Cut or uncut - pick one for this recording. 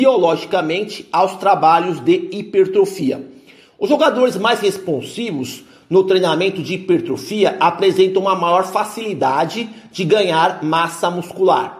uncut